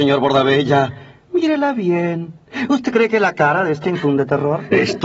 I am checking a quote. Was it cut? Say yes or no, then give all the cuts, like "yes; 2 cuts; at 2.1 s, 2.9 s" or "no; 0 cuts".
yes; 1 cut; at 3.8 s